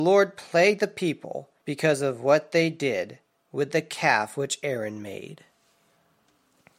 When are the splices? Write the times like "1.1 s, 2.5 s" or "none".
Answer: 1.6 s